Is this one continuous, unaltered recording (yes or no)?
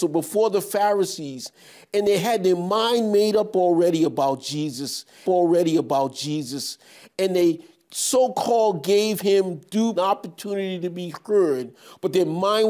no